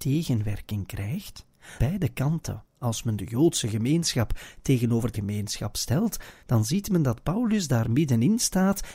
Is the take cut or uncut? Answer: cut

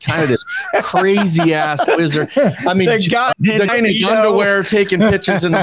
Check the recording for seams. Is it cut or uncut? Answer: cut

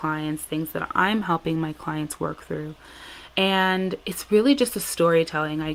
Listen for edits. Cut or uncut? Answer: uncut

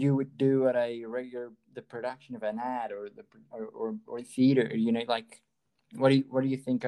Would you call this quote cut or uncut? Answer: uncut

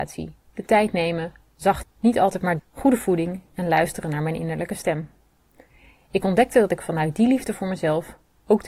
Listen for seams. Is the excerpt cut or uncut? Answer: cut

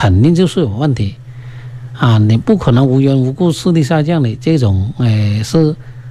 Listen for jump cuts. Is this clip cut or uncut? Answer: uncut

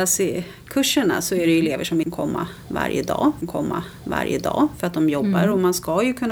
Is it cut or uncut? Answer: cut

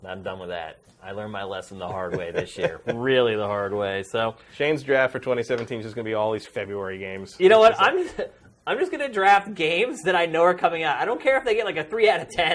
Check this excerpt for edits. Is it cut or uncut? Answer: uncut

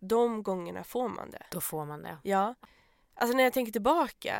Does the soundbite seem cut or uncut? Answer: uncut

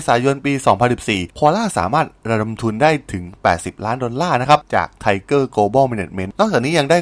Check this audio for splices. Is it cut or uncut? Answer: uncut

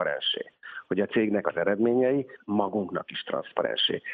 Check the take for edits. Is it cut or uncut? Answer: cut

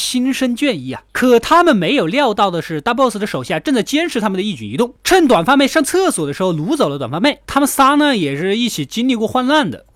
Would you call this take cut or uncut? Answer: uncut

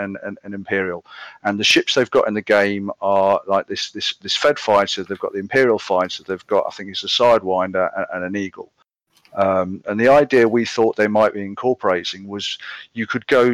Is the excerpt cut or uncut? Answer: uncut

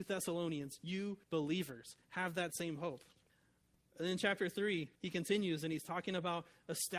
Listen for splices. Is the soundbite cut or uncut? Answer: cut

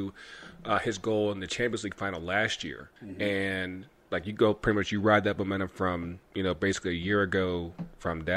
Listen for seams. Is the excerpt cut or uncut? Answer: cut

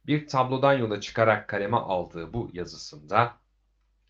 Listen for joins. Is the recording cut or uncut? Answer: uncut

